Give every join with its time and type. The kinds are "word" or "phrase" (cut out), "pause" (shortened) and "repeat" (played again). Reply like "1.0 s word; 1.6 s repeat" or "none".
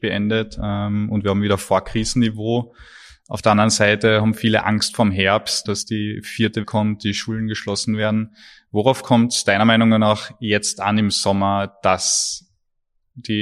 5.7 s word; 6.6 s word